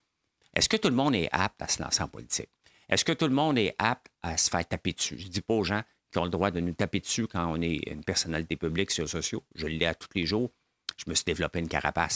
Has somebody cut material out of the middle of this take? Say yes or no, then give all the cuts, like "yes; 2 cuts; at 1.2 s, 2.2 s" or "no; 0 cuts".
yes; 1 cut; at 9.1 s